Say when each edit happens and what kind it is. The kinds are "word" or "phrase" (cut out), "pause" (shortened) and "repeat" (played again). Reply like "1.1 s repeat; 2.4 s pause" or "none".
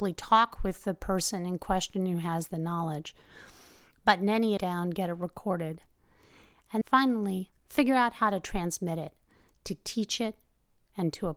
4.6 s phrase; 6.8 s word